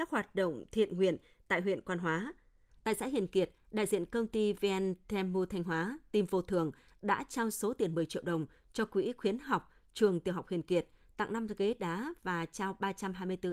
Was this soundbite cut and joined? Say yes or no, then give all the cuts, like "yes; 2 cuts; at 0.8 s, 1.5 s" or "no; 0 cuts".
no; 0 cuts